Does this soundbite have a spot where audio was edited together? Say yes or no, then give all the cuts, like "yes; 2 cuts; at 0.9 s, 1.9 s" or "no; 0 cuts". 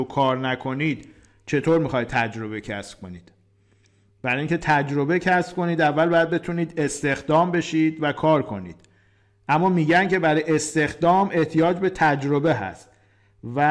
no; 0 cuts